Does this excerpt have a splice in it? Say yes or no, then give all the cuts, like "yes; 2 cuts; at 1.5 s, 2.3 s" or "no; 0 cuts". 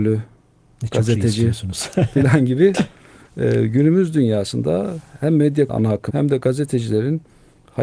yes; 2 cuts; at 5.7 s, 6.1 s